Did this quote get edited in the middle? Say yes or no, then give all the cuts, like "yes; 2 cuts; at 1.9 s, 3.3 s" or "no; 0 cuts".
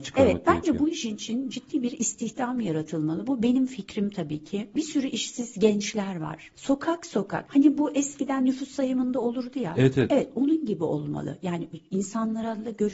no; 0 cuts